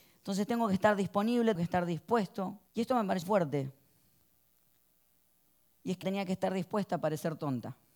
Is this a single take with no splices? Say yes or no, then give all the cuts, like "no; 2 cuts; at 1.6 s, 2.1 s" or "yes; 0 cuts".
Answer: no; 4 cuts; at 1.6 s, 2.7 s, 3.2 s, 6.0 s